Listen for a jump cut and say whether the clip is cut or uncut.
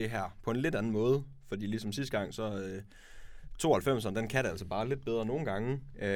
uncut